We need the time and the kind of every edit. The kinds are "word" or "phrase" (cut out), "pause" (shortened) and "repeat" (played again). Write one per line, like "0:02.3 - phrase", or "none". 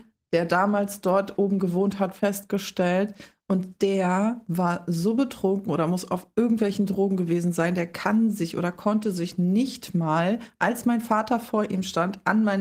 none

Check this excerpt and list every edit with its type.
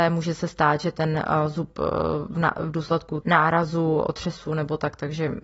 0:03.2 - word

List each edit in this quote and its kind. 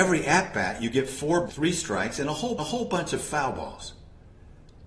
0:01.5 - word
0:02.6 - repeat

